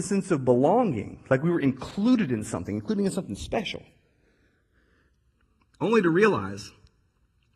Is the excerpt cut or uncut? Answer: uncut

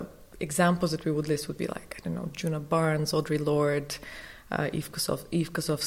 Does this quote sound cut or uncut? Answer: uncut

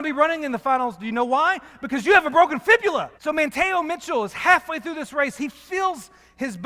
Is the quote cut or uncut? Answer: cut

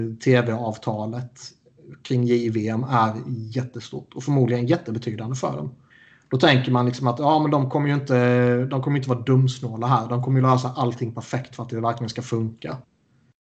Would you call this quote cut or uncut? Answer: cut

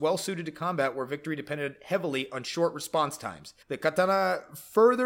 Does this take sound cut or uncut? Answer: cut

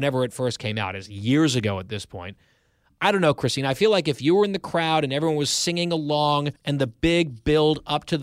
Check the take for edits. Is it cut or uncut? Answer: cut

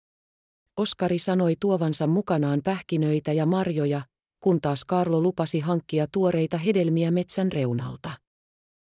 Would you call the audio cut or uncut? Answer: uncut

